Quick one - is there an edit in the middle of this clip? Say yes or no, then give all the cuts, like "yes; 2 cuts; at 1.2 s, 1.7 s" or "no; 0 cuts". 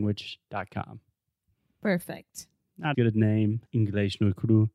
yes; 2 cuts; at 2.9 s, 3.7 s